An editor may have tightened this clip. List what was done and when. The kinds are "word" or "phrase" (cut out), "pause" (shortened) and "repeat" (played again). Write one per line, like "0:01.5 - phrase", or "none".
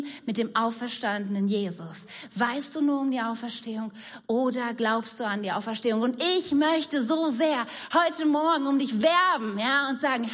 none